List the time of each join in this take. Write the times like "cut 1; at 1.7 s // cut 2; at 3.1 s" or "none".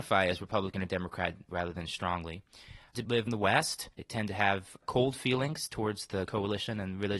cut 1; at 1.5 s // cut 2; at 2.9 s // cut 3; at 3.3 s // cut 4; at 3.9 s // cut 5; at 6.3 s